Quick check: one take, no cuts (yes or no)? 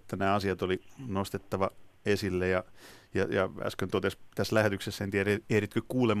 yes